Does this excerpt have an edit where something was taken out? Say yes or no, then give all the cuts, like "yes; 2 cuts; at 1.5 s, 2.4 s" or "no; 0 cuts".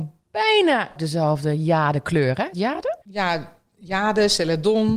yes; 3 cuts; at 1.0 s, 2.5 s, 3.0 s